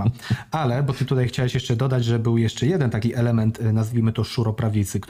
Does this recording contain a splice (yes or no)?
no